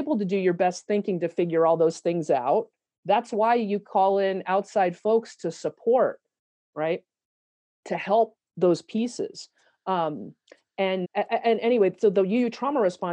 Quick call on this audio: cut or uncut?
cut